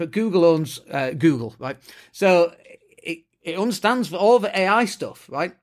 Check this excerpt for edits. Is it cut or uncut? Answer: uncut